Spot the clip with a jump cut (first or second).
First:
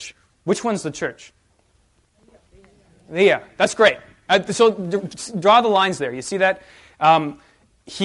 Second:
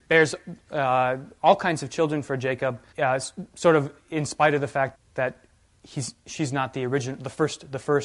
second